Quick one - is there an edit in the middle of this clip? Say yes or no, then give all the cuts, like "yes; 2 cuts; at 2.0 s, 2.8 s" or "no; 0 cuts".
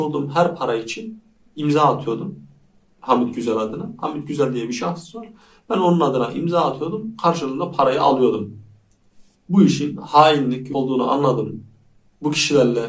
yes; 1 cut; at 10.7 s